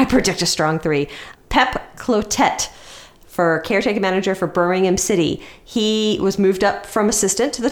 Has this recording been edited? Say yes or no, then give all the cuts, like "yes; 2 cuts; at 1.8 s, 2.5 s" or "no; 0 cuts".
no; 0 cuts